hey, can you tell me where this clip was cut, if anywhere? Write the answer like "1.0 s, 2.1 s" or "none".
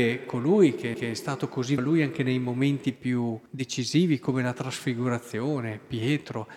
0.9 s, 1.8 s, 3.5 s